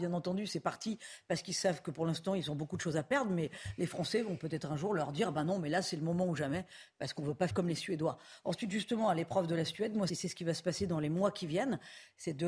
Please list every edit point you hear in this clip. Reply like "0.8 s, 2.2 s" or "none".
7.5 s, 10.1 s